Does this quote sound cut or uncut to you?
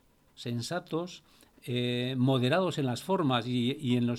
uncut